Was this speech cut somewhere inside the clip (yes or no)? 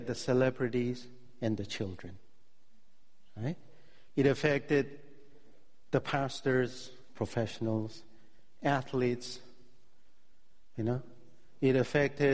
no